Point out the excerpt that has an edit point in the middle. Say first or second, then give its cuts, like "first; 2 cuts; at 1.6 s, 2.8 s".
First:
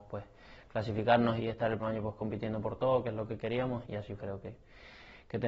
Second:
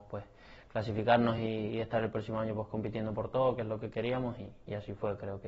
first; 4 cuts; at 1.4 s, 1.8 s, 3.8 s, 4.2 s